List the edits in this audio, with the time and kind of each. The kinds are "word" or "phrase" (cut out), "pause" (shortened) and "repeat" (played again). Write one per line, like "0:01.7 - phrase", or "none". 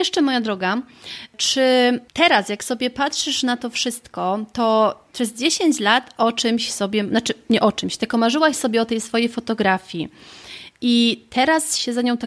none